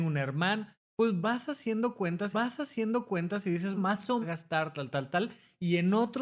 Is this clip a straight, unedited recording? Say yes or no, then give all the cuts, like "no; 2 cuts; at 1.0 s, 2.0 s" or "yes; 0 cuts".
no; 4 cuts; at 2.3 s, 3.8 s, 4.2 s, 4.9 s